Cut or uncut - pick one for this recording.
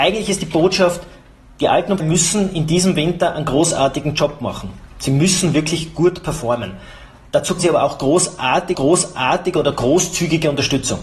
cut